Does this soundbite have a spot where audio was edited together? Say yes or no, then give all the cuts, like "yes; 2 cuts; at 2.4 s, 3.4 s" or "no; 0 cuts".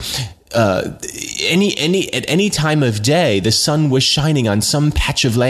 no; 0 cuts